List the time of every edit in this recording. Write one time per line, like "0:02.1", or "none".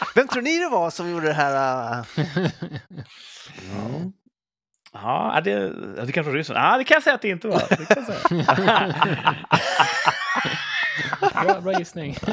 none